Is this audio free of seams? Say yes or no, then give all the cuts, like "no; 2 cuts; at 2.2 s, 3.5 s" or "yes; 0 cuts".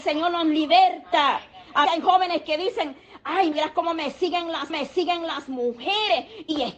no; 3 cuts; at 1.8 s, 3.5 s, 4.7 s